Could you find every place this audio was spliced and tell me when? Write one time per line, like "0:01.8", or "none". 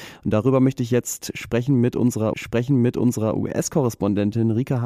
0:02.3